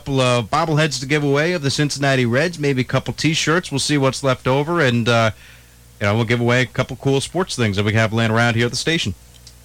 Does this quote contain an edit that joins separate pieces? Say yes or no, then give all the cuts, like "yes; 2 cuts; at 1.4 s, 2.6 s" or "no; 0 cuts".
no; 0 cuts